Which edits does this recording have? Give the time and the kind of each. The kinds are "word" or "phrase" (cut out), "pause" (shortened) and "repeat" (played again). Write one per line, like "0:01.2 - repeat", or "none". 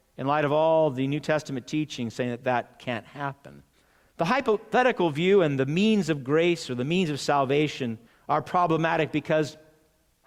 0:03.7 - pause
0:08.1 - pause